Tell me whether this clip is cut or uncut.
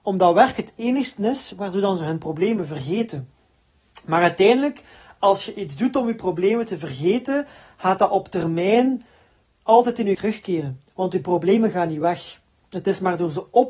cut